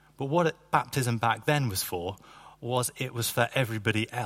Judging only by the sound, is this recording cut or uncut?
uncut